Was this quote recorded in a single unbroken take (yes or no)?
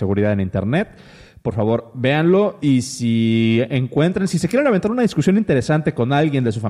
yes